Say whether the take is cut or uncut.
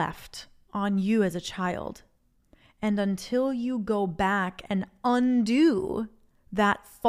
uncut